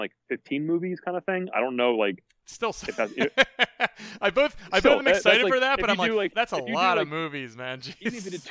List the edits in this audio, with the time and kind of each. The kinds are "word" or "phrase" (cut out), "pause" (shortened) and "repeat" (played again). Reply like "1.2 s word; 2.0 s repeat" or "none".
none